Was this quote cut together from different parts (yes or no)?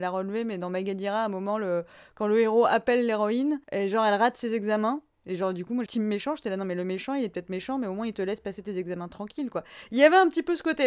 yes